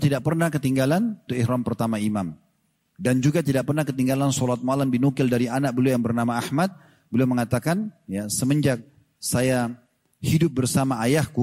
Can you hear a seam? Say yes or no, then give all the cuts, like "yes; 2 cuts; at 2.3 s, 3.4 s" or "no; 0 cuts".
yes; 1 cut; at 1.3 s